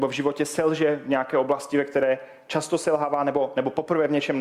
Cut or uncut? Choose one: uncut